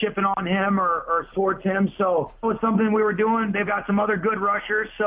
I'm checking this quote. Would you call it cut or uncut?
cut